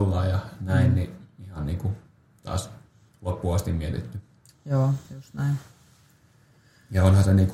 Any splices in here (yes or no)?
no